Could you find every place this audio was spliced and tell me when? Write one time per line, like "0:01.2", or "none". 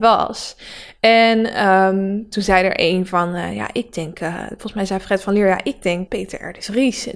0:06.1